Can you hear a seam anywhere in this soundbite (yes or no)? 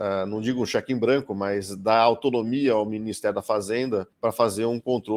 yes